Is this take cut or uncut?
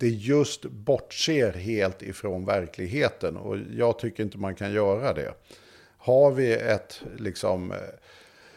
uncut